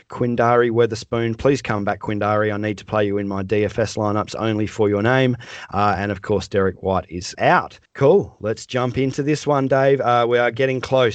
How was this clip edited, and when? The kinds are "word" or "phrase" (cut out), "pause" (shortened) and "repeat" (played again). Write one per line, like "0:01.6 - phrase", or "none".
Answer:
0:07.3 - word
0:07.9 - pause

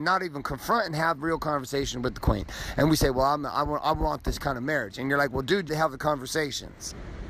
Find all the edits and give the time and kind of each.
0:05.7 - phrase

